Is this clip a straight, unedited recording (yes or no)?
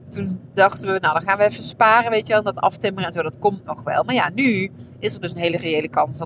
yes